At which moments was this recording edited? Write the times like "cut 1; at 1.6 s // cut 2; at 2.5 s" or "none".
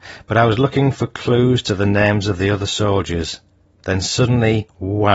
none